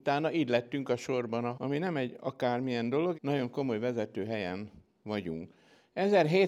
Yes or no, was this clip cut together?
yes